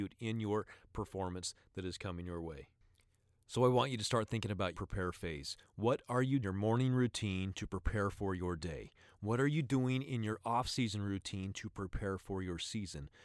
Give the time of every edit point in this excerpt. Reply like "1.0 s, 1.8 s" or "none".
4.7 s, 6.4 s